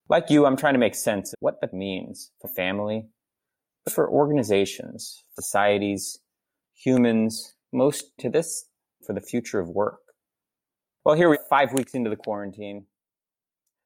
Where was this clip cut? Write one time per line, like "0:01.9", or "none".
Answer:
0:01.3
0:01.7
0:02.4
0:03.9
0:05.4
0:07.6
0:08.2
0:09.0
0:11.3